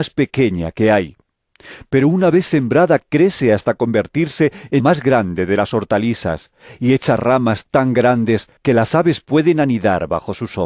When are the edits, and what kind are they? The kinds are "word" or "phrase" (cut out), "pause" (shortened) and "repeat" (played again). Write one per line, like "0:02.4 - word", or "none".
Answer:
0:04.8 - word
0:08.6 - pause